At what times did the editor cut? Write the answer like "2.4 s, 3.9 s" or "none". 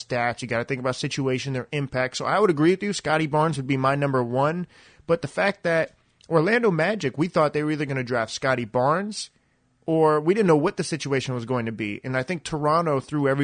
none